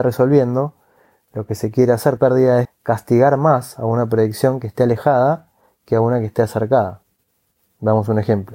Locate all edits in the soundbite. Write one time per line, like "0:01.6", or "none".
0:02.2
0:02.6